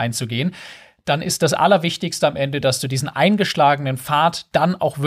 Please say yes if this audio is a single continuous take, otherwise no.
yes